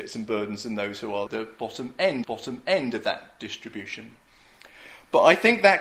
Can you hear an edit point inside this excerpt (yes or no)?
yes